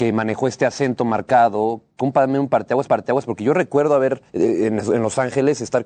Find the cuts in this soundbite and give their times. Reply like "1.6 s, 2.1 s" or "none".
2.0 s, 2.9 s, 4.3 s